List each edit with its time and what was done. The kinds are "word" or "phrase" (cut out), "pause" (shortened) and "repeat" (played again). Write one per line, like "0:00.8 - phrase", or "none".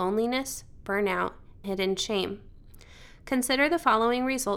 0:01.6 - word